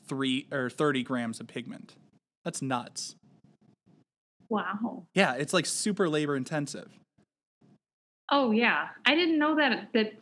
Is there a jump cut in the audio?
no; 0 cuts

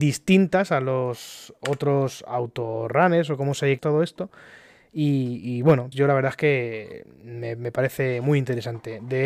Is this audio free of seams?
no; 2 cuts; at 3.8 s, 5.9 s

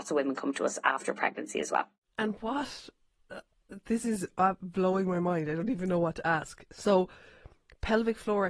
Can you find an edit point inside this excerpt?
no; 0 cuts

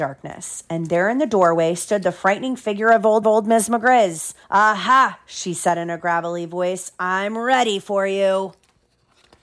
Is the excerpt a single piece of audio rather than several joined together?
no; 2 cuts; at 3.2 s, 4.4 s

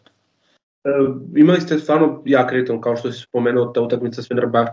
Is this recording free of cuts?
yes; 0 cuts

